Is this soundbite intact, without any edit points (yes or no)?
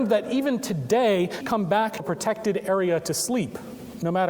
no